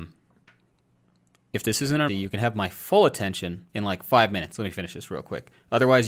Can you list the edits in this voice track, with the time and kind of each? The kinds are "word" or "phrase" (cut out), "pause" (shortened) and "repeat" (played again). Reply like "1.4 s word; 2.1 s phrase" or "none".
2.1 s word; 3.7 s pause